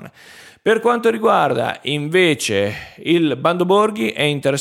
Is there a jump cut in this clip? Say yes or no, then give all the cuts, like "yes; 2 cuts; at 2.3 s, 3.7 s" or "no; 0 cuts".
no; 0 cuts